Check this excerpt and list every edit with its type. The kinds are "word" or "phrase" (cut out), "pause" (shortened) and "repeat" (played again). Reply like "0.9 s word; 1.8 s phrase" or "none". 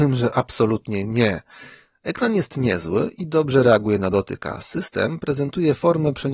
none